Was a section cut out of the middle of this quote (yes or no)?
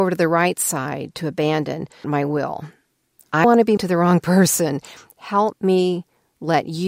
yes